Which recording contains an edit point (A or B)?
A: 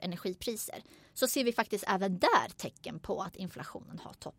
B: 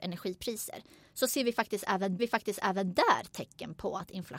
B